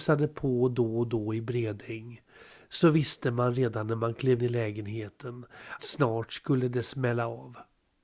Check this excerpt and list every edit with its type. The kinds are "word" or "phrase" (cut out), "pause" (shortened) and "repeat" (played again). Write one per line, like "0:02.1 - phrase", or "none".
0:04.4 - word
0:05.8 - word